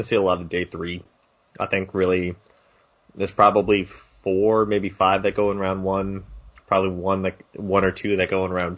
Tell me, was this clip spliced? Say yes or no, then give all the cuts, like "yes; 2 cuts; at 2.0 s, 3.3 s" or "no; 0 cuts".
no; 0 cuts